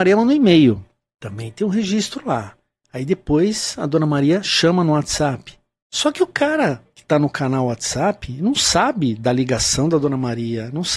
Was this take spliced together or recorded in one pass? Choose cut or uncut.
uncut